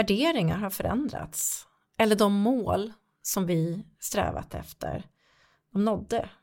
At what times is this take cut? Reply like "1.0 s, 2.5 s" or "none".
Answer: none